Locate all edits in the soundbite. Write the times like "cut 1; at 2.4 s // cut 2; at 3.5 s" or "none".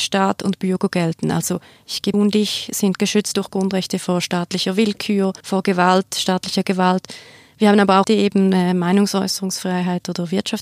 cut 1; at 2.1 s // cut 2; at 5.4 s // cut 3; at 8.0 s